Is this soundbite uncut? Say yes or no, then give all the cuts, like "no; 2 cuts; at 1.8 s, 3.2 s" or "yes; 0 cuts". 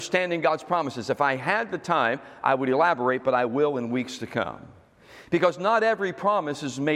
yes; 0 cuts